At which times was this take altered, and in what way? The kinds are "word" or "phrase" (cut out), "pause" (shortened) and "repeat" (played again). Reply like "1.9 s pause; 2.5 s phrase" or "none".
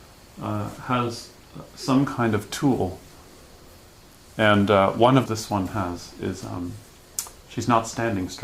5.3 s phrase